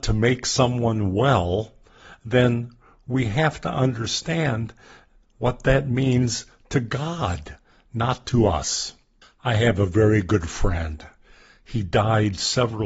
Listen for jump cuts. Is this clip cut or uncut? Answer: cut